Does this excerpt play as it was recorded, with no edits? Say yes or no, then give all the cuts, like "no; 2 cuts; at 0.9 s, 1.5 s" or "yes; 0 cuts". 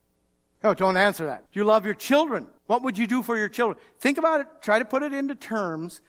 no; 2 cuts; at 1.5 s, 2.6 s